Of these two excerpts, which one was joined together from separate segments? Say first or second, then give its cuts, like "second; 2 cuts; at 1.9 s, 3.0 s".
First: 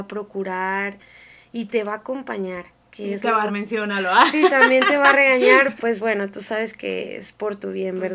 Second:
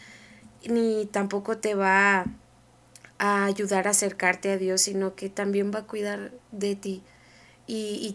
first; 2 cuts; at 3.5 s, 5.8 s